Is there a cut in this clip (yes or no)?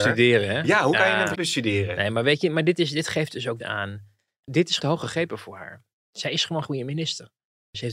yes